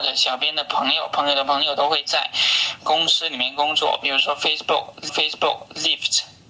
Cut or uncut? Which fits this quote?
cut